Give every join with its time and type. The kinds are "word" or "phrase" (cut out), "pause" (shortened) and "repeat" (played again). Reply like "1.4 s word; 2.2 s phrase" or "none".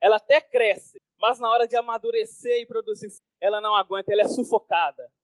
none